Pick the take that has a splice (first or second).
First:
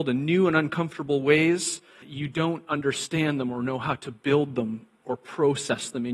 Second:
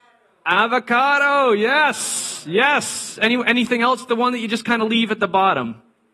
first